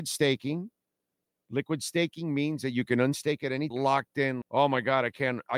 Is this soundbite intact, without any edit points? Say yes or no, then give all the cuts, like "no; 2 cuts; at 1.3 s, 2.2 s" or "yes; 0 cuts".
no; 2 cuts; at 3.7 s, 4.4 s